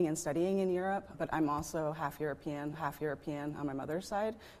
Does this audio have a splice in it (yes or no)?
yes